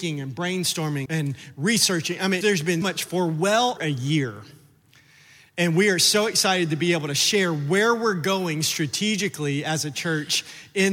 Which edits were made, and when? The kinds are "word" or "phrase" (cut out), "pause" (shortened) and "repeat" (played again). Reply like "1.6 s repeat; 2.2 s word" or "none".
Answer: 1.1 s word; 2.4 s word; 2.8 s word; 3.8 s word